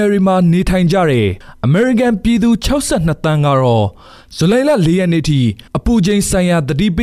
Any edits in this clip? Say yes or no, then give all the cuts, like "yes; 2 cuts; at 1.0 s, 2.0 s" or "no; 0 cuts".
no; 0 cuts